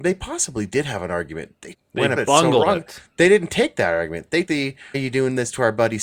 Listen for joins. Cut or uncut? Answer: cut